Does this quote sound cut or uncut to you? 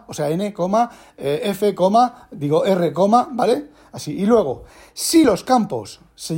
uncut